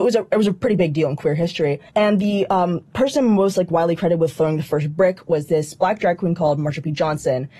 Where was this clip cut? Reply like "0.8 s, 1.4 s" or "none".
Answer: 1.9 s